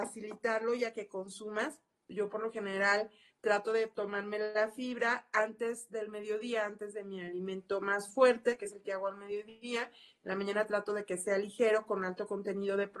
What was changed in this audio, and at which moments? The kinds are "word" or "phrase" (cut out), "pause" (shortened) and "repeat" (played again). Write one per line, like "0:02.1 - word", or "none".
none